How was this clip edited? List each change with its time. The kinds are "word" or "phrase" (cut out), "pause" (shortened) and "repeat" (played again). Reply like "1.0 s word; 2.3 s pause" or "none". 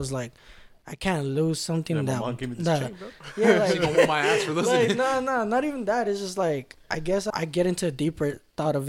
7.3 s word